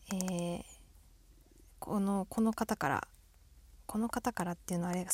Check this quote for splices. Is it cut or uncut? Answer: uncut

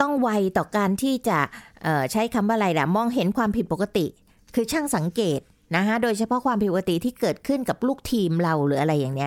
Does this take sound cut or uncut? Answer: uncut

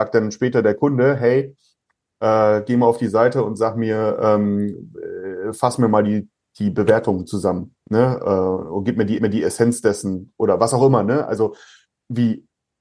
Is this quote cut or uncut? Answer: cut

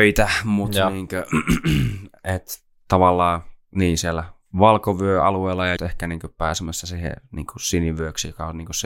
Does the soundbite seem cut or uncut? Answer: cut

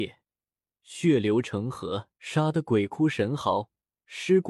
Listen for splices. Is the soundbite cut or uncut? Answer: cut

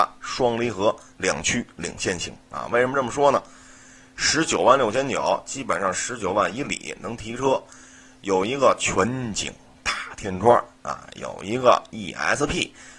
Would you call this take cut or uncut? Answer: uncut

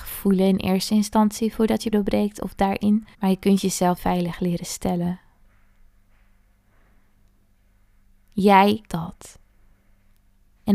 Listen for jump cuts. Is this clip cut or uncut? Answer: cut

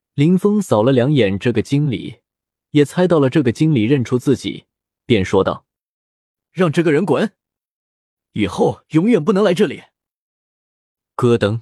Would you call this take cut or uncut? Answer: uncut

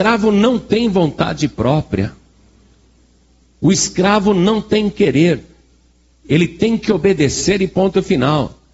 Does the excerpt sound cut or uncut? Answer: uncut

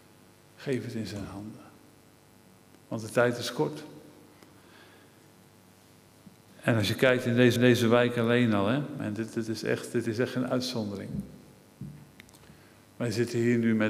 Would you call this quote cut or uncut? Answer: cut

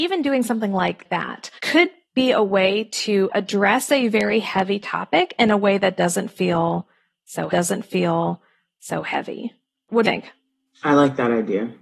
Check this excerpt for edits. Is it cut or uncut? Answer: cut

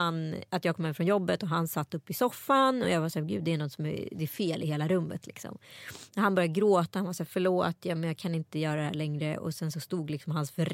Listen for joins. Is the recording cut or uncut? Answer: uncut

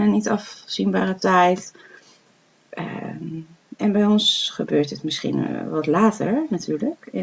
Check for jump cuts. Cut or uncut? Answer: uncut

